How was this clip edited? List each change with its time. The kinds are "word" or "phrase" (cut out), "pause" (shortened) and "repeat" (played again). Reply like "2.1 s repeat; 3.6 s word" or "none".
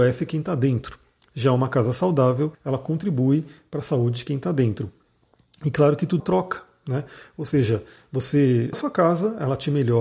2.5 s pause; 6.2 s phrase; 8.7 s word